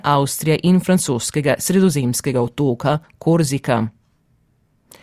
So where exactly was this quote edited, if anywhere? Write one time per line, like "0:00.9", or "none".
none